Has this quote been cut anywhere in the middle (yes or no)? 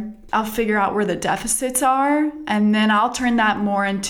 no